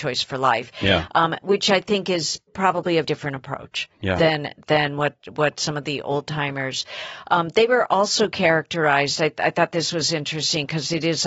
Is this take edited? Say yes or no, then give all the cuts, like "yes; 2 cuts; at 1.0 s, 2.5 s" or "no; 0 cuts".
yes; 2 cuts; at 2.5 s, 3.0 s